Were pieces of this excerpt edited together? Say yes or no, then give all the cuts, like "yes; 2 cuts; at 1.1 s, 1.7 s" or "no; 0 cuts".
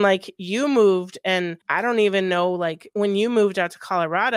yes; 1 cut; at 1.6 s